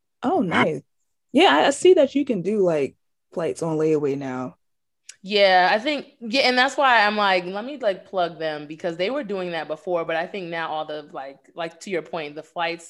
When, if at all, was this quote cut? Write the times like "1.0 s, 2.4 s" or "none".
none